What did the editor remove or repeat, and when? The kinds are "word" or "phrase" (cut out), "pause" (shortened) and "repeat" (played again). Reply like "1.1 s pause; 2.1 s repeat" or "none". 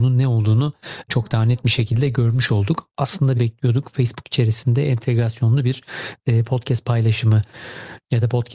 1.1 s word; 3.3 s word